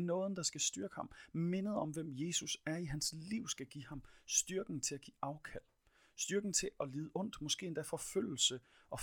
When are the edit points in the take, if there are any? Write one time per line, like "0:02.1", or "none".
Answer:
none